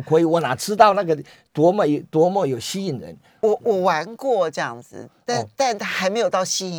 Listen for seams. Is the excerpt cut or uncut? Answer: uncut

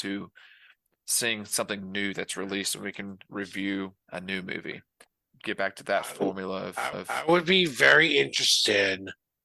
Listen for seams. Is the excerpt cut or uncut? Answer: cut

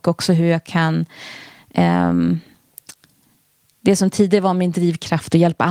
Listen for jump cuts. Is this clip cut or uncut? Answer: uncut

